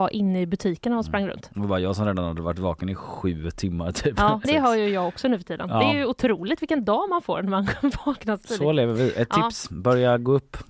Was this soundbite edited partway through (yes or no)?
yes